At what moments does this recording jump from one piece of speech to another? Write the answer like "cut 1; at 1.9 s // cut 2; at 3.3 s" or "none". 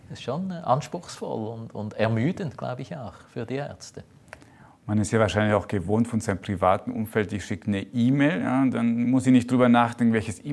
none